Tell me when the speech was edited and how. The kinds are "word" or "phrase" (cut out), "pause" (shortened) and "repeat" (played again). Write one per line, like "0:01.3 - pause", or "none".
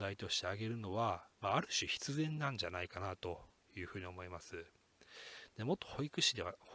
0:01.3 - pause